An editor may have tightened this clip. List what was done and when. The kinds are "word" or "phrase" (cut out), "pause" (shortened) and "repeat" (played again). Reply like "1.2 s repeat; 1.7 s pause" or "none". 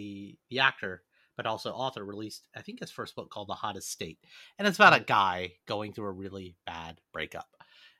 none